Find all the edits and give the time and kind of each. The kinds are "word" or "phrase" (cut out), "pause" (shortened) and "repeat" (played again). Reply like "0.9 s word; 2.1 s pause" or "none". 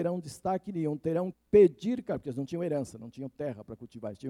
1.3 s phrase